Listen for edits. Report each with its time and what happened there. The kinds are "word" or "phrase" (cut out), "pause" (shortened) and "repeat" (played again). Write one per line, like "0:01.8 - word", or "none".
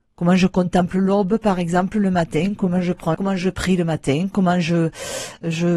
0:03.1 - word